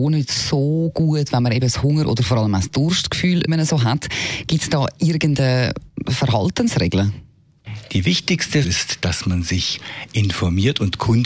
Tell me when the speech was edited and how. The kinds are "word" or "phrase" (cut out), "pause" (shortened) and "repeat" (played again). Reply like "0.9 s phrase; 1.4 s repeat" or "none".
3.5 s word; 8.6 s word